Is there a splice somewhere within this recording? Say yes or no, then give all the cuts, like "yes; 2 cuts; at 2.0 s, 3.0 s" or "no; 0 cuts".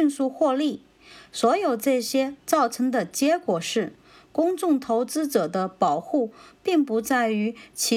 no; 0 cuts